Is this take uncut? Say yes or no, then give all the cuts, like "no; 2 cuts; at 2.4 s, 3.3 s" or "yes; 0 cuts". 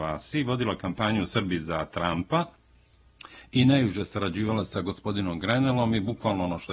yes; 0 cuts